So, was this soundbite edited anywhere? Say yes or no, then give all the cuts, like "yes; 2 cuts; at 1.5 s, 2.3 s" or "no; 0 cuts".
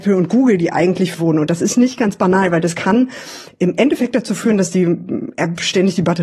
yes; 1 cut; at 1.1 s